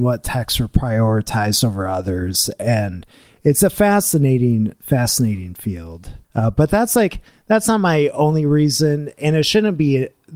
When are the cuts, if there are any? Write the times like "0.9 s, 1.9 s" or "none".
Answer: 6.2 s